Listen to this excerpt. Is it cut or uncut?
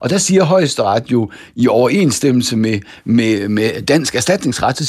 uncut